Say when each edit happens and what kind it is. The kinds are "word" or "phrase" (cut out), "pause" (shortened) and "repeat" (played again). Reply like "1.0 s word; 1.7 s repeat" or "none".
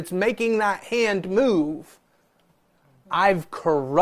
none